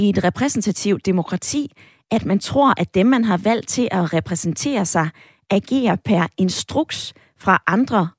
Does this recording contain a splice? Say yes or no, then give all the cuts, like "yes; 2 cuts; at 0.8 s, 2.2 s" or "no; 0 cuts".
no; 0 cuts